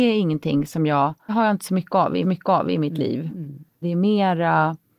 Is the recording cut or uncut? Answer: cut